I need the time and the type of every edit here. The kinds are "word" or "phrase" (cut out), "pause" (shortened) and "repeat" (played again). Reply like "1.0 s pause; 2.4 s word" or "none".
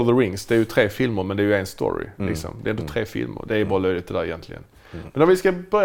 none